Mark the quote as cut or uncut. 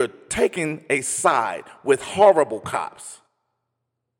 uncut